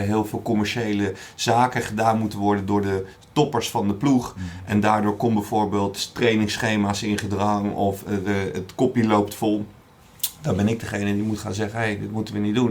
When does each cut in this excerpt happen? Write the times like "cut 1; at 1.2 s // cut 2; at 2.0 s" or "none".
none